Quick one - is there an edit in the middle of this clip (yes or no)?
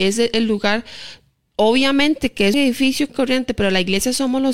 yes